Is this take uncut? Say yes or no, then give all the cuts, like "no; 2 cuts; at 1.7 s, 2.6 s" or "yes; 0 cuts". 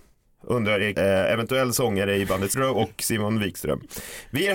no; 2 cuts; at 0.9 s, 2.5 s